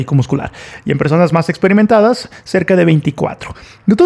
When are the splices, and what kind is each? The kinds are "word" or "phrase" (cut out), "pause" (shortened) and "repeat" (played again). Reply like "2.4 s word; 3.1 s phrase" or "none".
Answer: none